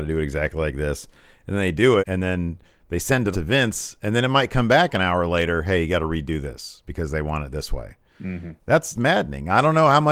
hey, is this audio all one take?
no; 3 cuts; at 2.0 s, 3.3 s, 8.9 s

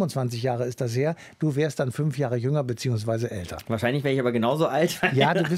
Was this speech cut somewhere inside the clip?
no; 0 cuts

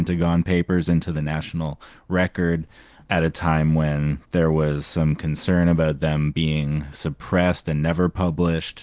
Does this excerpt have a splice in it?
no; 0 cuts

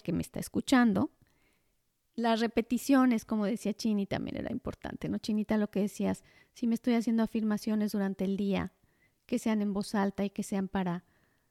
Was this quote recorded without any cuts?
yes; 0 cuts

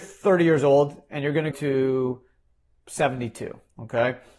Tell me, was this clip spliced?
yes; 1 cut; at 1.5 s

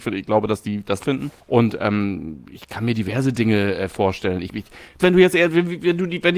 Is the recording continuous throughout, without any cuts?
no; 4 cuts; at 1.0 s, 1.4 s, 4.5 s, 5.0 s

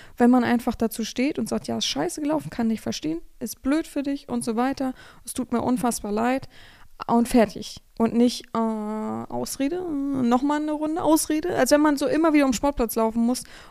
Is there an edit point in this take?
no; 0 cuts

